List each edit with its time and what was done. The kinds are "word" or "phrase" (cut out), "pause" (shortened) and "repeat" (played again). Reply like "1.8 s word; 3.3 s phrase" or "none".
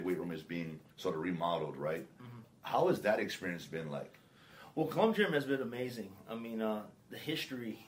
0.9 s pause